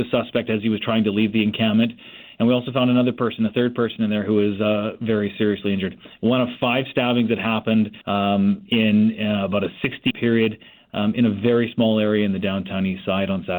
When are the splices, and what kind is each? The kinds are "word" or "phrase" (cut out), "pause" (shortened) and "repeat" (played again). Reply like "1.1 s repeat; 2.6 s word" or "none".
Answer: 8.0 s pause; 10.1 s word